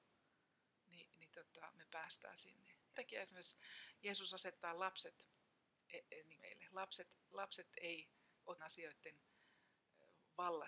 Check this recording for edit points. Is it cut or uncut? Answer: cut